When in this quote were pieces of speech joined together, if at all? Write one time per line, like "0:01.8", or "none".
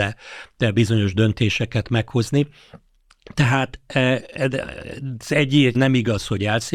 0:05.7